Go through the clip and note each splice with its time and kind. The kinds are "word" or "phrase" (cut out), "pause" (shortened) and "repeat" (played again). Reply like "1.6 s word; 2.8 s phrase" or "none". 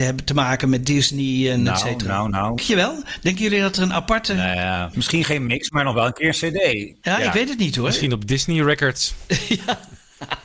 2.6 s word